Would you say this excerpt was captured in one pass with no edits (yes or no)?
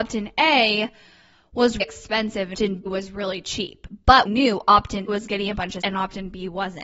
no